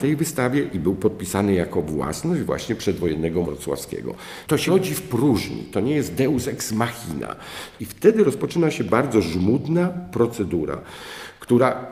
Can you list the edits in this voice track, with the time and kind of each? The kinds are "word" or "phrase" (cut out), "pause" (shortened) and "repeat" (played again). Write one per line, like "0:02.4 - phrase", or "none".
0:03.4 - word
0:04.7 - word

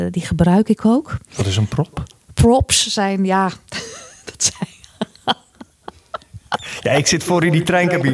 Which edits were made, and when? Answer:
none

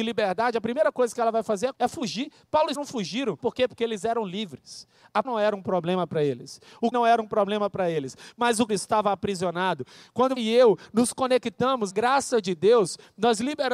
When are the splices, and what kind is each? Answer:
0:01.7 - word
0:02.7 - word
0:03.4 - word
0:05.2 - word
0:06.9 - word
0:08.7 - word
0:10.4 - word
0:11.9 - word

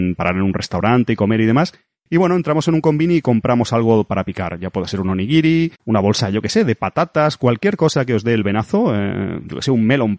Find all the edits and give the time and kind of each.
0:05.8 - pause

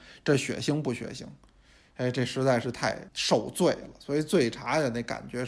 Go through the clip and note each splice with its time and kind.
0:03.1 - pause

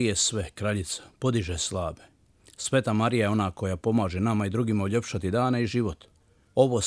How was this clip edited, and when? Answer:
none

